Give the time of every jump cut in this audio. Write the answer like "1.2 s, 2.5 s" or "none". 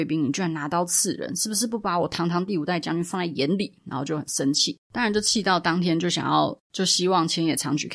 4.8 s, 6.6 s